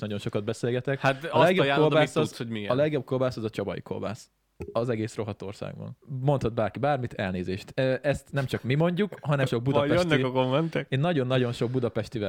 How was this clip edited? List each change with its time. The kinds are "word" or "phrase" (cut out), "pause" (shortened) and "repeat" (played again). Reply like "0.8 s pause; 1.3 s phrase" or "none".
6.0 s pause; 9.5 s phrase